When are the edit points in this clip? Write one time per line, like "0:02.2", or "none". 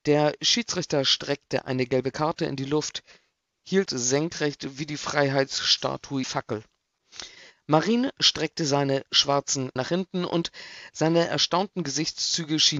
0:03.9
0:06.2
0:09.8